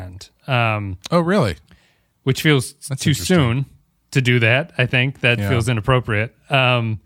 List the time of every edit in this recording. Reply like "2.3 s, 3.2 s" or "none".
none